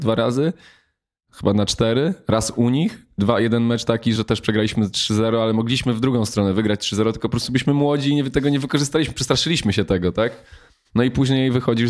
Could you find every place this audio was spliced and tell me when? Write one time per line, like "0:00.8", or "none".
0:04.2